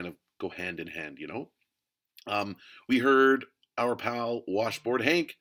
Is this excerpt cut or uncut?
uncut